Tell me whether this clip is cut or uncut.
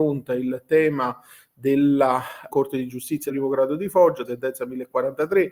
cut